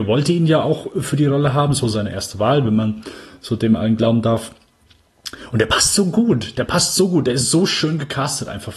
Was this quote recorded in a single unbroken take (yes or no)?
no